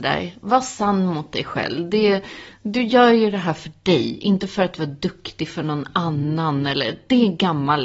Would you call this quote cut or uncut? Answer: uncut